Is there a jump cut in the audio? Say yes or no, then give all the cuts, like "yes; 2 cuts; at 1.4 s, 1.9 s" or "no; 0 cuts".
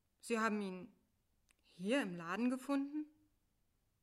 no; 0 cuts